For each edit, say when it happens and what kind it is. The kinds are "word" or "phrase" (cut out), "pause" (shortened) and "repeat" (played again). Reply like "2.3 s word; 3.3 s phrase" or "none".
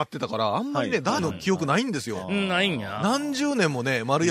1.2 s word